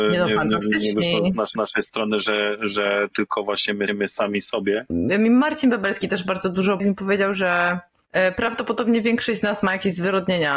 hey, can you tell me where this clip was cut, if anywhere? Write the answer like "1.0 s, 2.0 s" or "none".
1.5 s, 3.9 s, 6.8 s